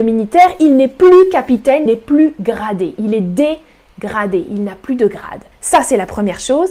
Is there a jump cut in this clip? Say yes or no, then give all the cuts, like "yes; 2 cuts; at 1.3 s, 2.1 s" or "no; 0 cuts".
yes; 2 cuts; at 1.9 s, 5.5 s